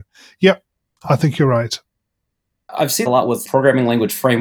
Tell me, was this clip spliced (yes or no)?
yes